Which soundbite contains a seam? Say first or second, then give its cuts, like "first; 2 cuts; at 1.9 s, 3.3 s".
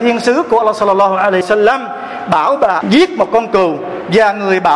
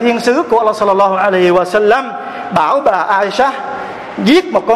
first; 2 cuts; at 1.4 s, 2.8 s